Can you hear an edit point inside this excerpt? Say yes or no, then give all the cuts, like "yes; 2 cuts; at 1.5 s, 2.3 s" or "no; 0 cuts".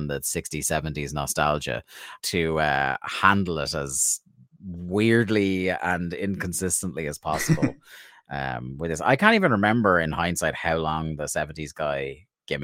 yes; 1 cut; at 2.2 s